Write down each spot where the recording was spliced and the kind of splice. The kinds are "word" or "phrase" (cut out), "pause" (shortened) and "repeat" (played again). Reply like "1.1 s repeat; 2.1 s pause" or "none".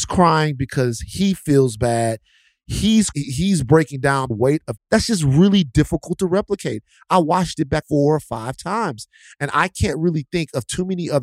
3.1 s word; 4.3 s phrase; 4.8 s word; 7.8 s word